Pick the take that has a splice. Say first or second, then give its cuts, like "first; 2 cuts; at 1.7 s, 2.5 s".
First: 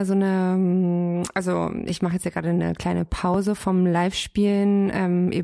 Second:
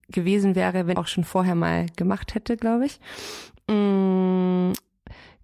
second; 1 cut; at 0.9 s